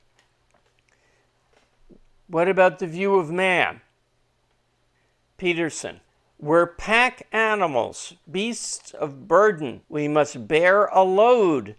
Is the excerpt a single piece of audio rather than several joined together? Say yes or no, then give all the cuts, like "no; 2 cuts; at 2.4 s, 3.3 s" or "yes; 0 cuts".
no; 2 cuts; at 6.1 s, 9.8 s